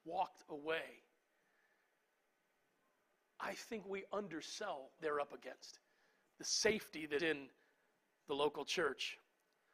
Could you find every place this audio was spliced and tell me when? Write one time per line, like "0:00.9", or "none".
0:05.0
0:07.2